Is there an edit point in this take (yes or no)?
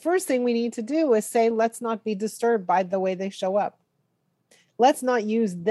no